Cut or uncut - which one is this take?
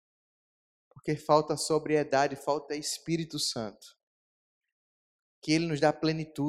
uncut